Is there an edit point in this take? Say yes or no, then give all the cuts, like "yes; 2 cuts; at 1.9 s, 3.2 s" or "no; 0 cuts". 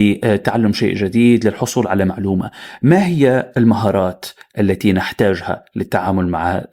no; 0 cuts